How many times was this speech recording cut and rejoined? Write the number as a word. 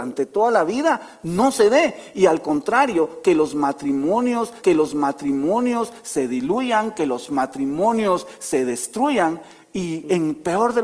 one